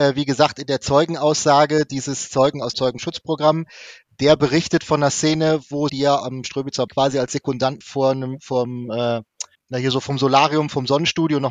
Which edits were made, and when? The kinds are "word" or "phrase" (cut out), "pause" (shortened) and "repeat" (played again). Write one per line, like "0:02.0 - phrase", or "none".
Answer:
0:02.7 - word
0:05.9 - phrase
0:06.2 - word
0:06.9 - word
0:07.8 - phrase
0:09.5 - pause